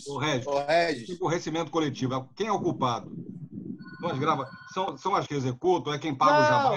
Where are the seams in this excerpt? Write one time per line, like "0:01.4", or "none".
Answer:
0:05.3